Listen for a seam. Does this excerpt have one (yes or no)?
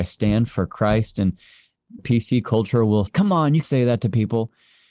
yes